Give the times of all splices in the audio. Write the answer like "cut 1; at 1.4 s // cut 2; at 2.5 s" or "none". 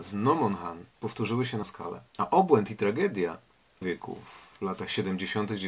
cut 1; at 0.9 s // cut 2; at 1.6 s // cut 3; at 2.1 s // cut 4; at 3.8 s